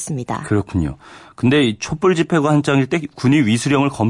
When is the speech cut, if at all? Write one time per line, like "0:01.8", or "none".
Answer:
none

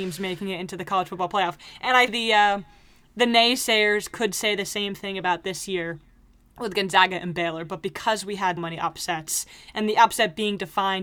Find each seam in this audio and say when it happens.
0:02.1
0:08.6

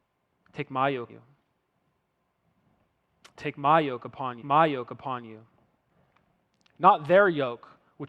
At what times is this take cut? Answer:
0:01.1
0:04.4

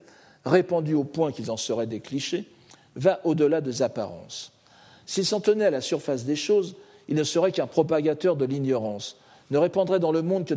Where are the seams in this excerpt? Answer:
none

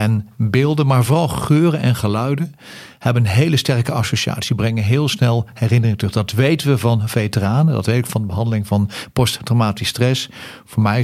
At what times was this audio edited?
none

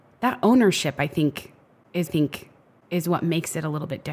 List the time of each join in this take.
0:02.1

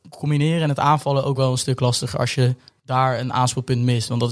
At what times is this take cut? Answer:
none

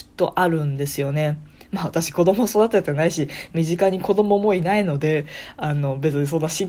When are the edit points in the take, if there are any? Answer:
none

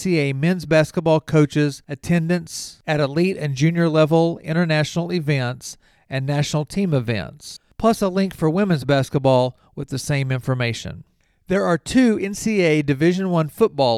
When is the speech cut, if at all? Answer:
none

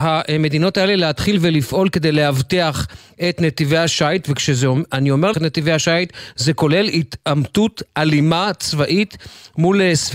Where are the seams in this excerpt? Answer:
0:05.3

